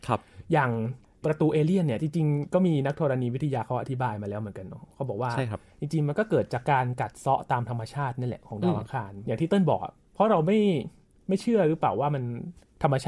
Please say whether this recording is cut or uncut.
uncut